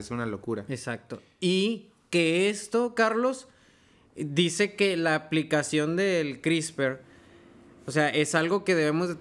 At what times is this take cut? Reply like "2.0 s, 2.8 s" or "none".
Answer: none